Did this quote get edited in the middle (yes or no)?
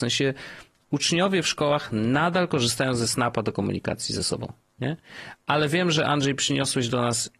no